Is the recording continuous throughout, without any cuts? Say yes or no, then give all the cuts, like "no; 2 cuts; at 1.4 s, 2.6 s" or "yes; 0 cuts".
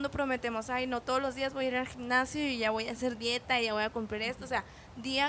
yes; 0 cuts